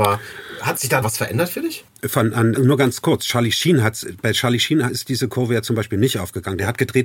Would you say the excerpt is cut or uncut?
cut